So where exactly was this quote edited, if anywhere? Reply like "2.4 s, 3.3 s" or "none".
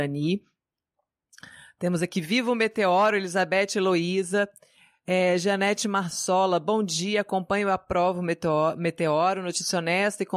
none